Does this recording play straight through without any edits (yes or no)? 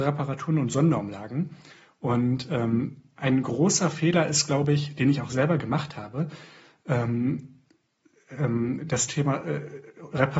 yes